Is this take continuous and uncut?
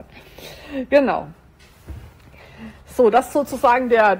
yes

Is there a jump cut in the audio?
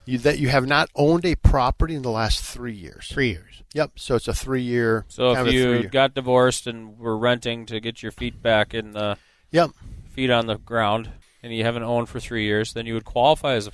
yes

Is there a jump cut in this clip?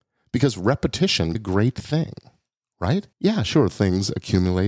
yes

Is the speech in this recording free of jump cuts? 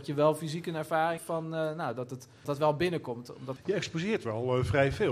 no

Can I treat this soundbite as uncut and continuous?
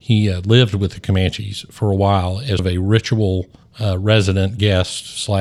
no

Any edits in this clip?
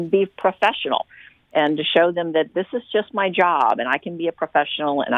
no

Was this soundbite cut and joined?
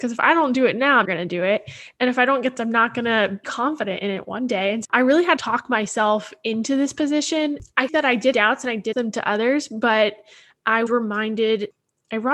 yes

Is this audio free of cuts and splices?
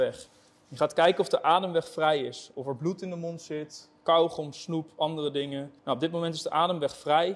no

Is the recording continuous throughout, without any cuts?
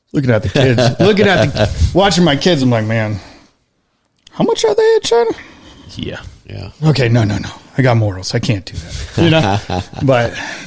yes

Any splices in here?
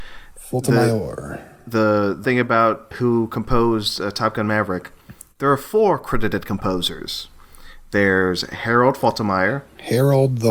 yes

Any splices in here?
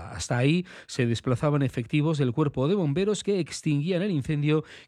no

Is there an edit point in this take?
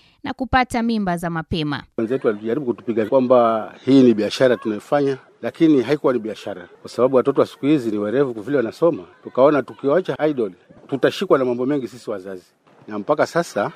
yes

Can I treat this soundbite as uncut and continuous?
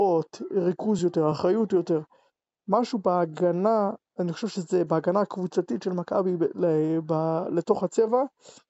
yes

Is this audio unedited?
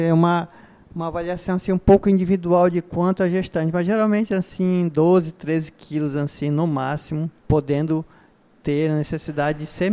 no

